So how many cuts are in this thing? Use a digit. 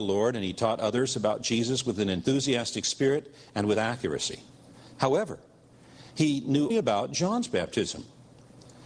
1